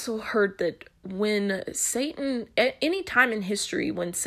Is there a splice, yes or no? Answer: yes